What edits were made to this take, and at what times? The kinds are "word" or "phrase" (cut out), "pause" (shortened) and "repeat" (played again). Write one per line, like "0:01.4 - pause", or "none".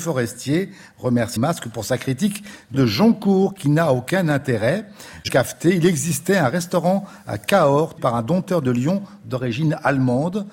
0:01.4 - word
0:02.7 - word
0:05.3 - word
0:08.0 - word